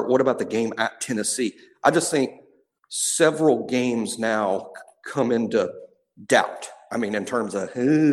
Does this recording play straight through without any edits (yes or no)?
yes